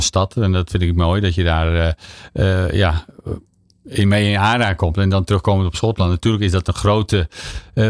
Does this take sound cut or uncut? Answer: uncut